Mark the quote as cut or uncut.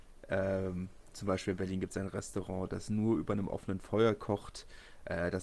uncut